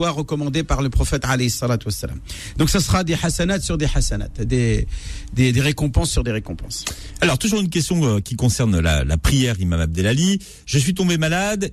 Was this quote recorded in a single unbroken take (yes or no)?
yes